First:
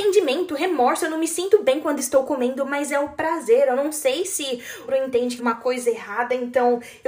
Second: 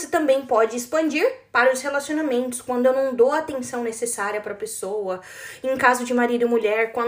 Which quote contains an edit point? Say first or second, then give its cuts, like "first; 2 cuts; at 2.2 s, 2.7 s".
first; 2 cuts; at 4.9 s, 5.4 s